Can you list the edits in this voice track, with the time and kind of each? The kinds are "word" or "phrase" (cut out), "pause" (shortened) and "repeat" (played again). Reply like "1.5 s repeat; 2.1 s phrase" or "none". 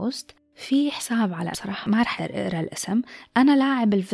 1.5 s word; 2.2 s word